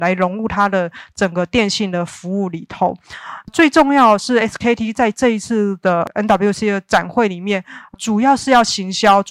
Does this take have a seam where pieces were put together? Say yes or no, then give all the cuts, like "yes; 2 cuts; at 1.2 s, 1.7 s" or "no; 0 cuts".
no; 0 cuts